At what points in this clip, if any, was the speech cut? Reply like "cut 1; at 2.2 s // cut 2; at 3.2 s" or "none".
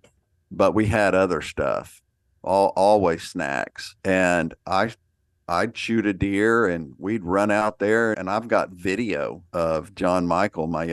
cut 1; at 4.0 s // cut 2; at 8.1 s // cut 3; at 9.5 s

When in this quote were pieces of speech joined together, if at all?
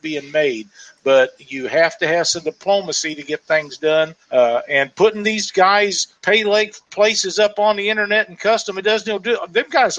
cut 1; at 4.2 s // cut 2; at 6.2 s // cut 3; at 6.9 s

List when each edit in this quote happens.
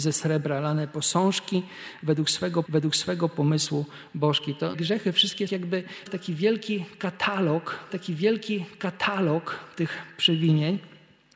cut 1; at 2.6 s // cut 2; at 4.7 s // cut 3; at 5.5 s // cut 4; at 6.1 s // cut 5; at 7.9 s

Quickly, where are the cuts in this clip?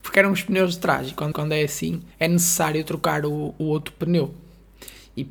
cut 1; at 1.3 s // cut 2; at 2.1 s

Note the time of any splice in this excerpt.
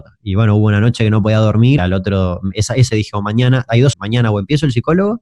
cut 1; at 1.8 s // cut 2; at 2.9 s // cut 3; at 3.9 s

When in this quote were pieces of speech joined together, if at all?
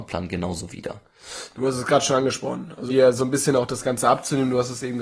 cut 1; at 2.9 s

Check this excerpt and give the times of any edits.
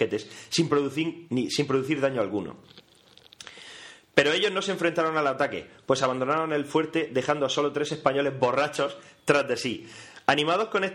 none

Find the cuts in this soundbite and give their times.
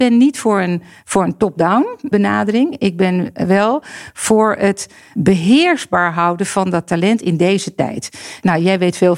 none

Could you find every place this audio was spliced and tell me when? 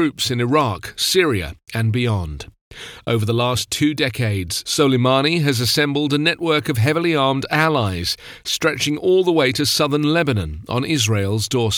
none

